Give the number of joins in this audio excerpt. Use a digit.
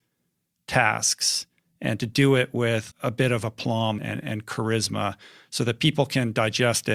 2